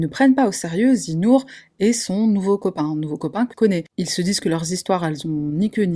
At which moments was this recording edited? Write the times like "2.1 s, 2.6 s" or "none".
3.5 s